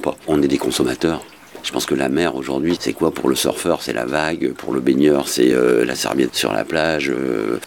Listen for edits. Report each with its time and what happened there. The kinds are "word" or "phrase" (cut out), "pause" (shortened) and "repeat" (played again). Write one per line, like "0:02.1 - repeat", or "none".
none